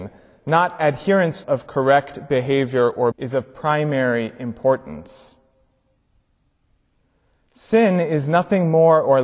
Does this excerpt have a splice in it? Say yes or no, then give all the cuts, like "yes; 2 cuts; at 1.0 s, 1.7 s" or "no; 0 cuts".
yes; 2 cuts; at 1.4 s, 3.1 s